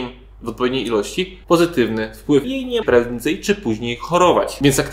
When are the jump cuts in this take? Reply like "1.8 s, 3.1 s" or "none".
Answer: 1.4 s, 2.4 s, 2.8 s